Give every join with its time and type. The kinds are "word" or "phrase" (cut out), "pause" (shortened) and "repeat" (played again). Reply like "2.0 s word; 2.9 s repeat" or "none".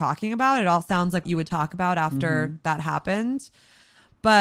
1.2 s word